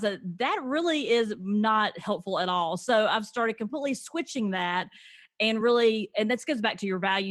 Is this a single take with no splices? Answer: yes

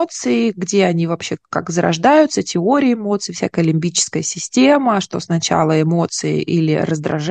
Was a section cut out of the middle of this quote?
no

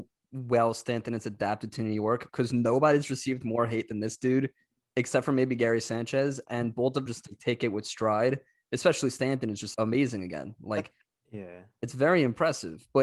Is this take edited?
yes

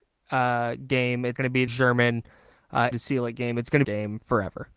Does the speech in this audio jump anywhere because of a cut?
yes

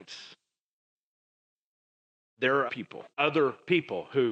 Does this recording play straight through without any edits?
no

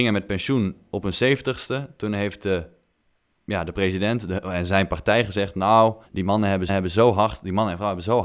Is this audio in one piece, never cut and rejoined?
no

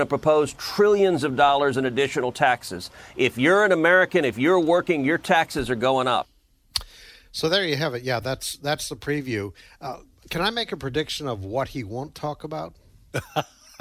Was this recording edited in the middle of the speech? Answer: no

